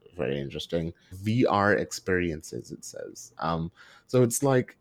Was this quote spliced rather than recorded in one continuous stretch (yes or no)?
yes